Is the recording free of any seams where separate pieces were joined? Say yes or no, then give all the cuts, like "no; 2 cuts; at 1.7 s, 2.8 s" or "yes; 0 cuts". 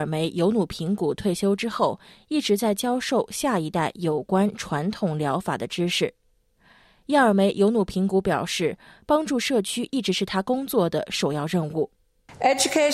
yes; 0 cuts